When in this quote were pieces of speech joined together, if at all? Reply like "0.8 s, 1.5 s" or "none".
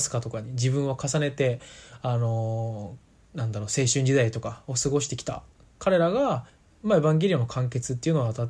6.5 s